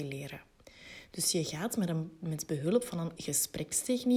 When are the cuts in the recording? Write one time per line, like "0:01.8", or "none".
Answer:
0:03.2